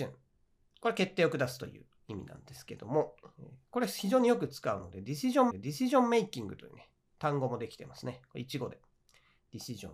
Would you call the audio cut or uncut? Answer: cut